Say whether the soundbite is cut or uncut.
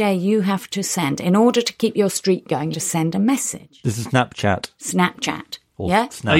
cut